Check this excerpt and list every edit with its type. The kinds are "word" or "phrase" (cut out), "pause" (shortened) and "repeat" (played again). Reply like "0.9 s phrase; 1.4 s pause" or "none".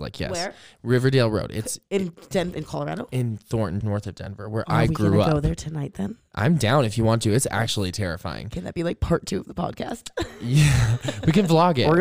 3.8 s word